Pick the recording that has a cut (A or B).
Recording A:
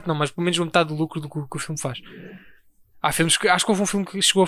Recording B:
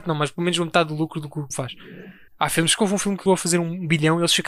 B